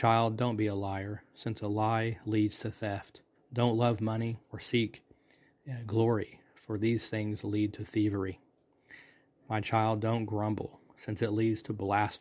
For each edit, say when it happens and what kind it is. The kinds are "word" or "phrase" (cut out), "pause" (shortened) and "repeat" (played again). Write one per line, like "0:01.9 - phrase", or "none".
0:03.4 - pause
0:04.4 - pause